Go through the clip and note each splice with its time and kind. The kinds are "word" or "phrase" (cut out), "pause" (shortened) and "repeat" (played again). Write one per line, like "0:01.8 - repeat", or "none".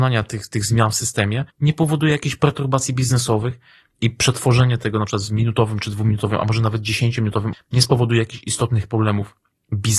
0:01.5 - pause
0:07.5 - word